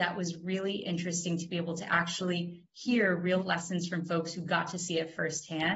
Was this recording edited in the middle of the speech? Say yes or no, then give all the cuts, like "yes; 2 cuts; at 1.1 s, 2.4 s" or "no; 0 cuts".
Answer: yes; 1 cut; at 3.4 s